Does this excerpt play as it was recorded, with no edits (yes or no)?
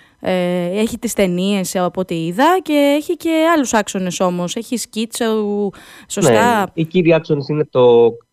yes